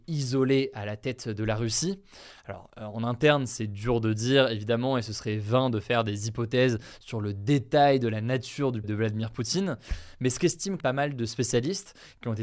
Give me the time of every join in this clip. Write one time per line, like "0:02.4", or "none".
0:08.8
0:10.8